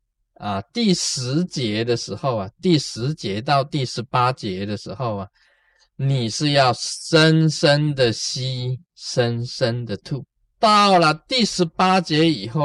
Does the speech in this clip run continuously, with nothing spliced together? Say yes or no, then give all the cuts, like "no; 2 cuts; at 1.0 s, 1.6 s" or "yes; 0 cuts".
no; 1 cut; at 10.4 s